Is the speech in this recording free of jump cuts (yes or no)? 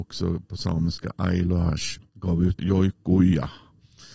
no